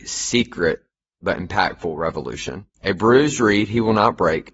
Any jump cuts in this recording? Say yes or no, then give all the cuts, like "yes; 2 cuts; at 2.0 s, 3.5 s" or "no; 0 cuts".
yes; 1 cut; at 2.7 s